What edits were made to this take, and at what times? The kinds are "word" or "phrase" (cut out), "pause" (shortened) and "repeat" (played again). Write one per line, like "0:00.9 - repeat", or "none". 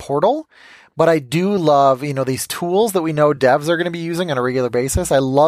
none